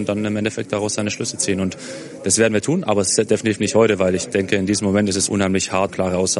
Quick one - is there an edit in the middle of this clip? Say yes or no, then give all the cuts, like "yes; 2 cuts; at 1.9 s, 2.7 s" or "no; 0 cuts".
no; 0 cuts